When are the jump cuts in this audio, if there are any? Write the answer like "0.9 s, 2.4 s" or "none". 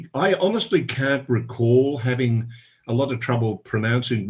none